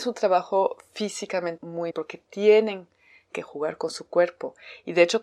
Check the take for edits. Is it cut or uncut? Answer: cut